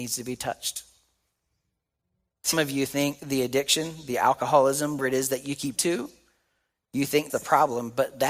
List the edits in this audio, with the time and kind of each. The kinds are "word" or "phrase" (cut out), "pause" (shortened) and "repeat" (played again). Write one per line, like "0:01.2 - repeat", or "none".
0:02.5 - word
0:05.0 - word
0:05.8 - word
0:07.3 - word